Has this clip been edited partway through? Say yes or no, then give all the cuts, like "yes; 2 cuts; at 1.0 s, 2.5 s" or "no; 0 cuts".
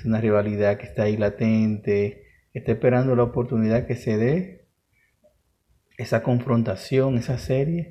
no; 0 cuts